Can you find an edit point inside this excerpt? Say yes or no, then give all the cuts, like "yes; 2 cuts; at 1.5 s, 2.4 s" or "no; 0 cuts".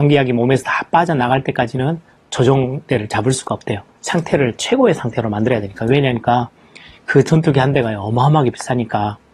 no; 0 cuts